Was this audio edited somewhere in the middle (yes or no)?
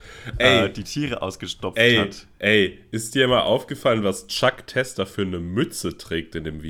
no